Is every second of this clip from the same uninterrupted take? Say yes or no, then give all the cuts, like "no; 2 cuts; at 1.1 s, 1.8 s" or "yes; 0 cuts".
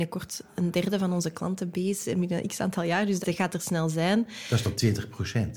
no; 1 cut; at 3.2 s